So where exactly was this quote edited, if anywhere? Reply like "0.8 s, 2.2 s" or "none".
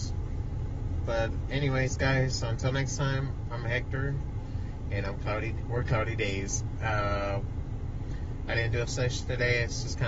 8.8 s